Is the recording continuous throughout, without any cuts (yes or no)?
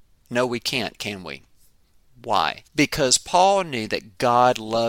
no